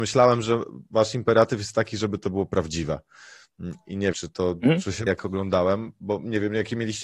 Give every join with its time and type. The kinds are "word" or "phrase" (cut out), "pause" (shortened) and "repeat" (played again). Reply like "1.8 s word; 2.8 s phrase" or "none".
4.1 s word; 5.1 s word